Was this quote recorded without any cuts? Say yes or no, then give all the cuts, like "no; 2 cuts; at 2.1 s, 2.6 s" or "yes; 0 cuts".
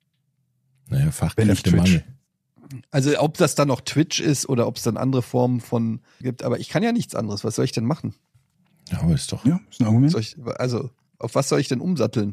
no; 2 cuts; at 6.2 s, 8.5 s